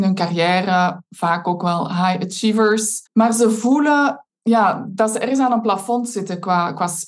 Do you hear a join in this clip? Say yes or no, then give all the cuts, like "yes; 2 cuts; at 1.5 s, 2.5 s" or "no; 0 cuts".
yes; 2 cuts; at 3.1 s, 4.3 s